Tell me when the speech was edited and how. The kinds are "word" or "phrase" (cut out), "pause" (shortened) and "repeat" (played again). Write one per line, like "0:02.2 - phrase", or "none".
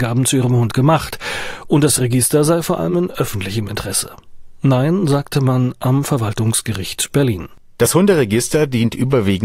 none